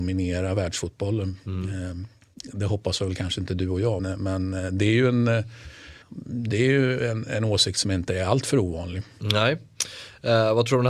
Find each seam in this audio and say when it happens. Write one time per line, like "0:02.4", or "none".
0:04.0
0:06.0